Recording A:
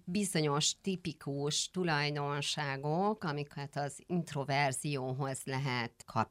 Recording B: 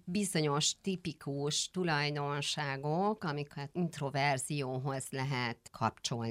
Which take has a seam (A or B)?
B